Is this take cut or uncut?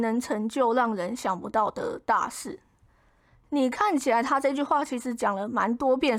uncut